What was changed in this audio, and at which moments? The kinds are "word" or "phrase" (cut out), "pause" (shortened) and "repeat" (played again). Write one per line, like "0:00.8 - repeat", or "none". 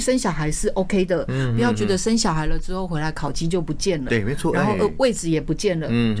none